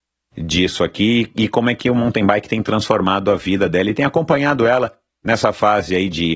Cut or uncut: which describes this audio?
uncut